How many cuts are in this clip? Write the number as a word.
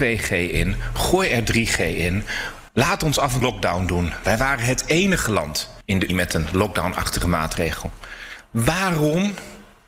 three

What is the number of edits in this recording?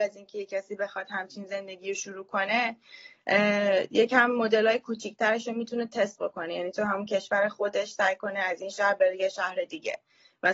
zero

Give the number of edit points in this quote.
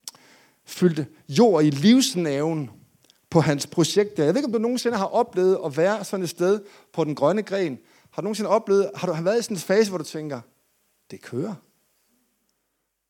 zero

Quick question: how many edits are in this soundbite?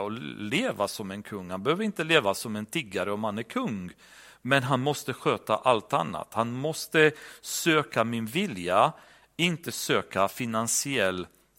zero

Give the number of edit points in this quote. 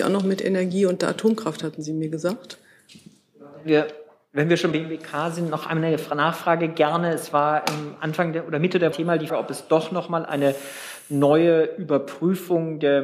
three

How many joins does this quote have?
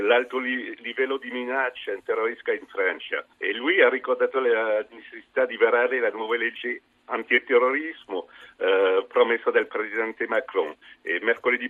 one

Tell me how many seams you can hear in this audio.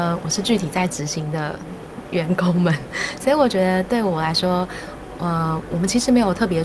one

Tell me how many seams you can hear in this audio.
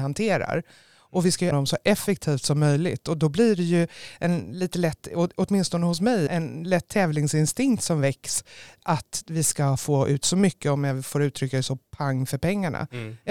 two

